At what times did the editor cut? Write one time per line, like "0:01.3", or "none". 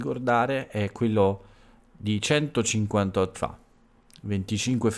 0:03.3